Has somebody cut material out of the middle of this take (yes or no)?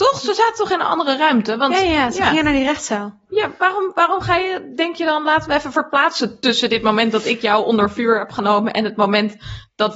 no